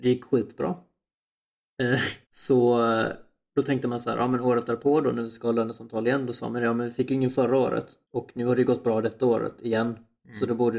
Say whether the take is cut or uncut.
cut